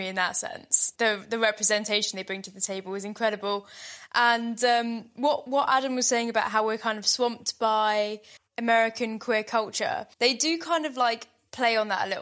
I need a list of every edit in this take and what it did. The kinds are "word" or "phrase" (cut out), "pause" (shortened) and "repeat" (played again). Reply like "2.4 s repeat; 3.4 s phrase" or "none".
0.9 s pause; 8.4 s pause; 10.1 s pause